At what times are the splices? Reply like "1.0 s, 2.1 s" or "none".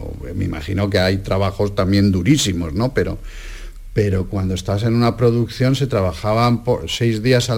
none

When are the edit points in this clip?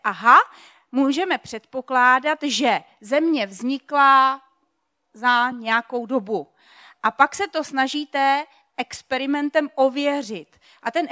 none

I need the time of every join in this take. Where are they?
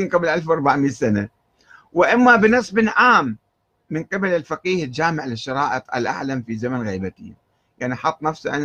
none

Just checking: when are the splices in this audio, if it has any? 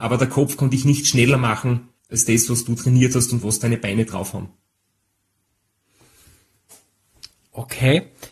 2.0 s

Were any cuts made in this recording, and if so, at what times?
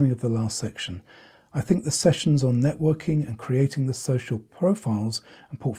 none

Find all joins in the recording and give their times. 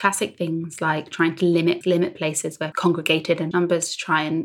1.8 s, 2.7 s, 3.5 s

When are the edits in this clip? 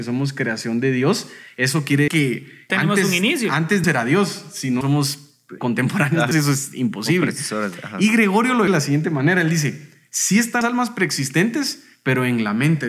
2.1 s, 2.7 s, 3.8 s, 4.8 s, 5.6 s, 6.3 s, 8.7 s, 10.6 s

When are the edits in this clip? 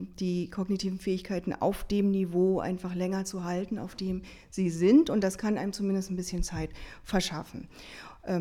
none

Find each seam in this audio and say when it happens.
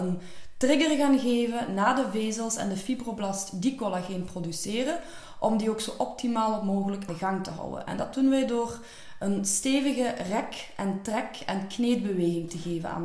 7.1 s

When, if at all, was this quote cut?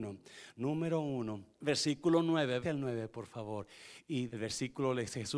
1.5 s, 2.6 s, 4.3 s

